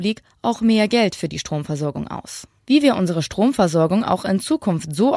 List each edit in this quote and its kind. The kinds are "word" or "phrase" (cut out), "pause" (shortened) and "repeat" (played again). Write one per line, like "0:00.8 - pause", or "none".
0:02.6 - pause